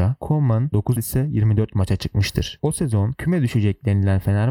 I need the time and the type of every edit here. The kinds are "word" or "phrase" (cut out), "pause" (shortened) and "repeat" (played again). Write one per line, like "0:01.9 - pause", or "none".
0:01.0 - phrase